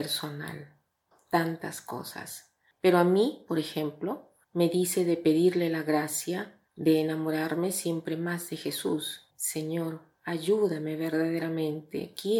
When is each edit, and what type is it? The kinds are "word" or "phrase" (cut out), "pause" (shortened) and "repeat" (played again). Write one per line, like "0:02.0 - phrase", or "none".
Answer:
0:01.1 - pause
0:04.4 - pause
0:06.7 - pause
0:09.3 - pause